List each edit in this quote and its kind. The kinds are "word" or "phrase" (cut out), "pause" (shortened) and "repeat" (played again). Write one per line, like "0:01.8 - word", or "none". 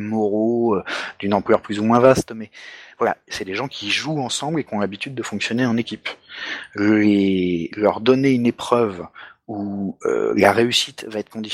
none